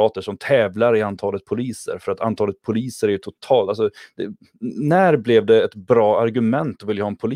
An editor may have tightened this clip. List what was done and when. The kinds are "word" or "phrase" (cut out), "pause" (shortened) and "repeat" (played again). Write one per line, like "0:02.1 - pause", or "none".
none

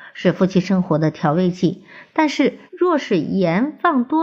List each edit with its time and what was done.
0:02.7 - pause

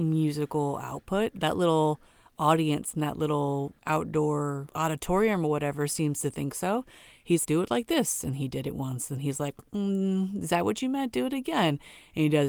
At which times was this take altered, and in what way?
0:07.4 - word

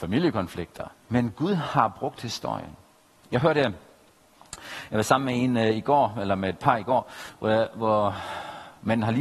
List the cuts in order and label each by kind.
0:01.0 - pause

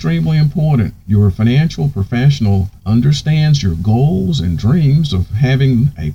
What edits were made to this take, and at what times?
0:01.0 - pause
0:02.8 - pause

